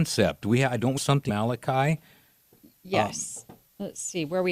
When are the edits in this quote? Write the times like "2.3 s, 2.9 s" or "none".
1.0 s, 1.3 s